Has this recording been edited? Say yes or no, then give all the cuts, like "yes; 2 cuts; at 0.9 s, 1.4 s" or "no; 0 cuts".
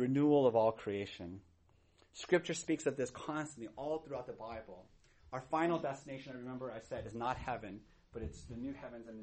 no; 0 cuts